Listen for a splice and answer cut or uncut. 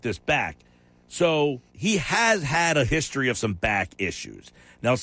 cut